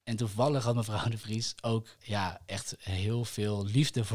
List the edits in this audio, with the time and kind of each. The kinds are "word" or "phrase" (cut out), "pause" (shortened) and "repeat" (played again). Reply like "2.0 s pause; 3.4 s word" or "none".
none